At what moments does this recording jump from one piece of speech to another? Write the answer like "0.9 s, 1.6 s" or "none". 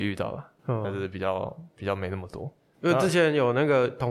none